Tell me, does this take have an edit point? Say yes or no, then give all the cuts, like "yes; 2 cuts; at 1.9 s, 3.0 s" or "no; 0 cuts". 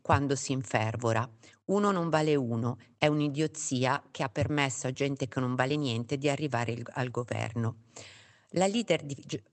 no; 0 cuts